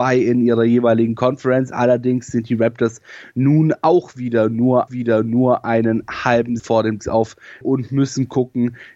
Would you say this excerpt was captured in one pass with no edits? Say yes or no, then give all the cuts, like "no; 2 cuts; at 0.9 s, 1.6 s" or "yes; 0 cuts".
no; 4 cuts; at 4.9 s, 6.6 s, 7.0 s, 7.6 s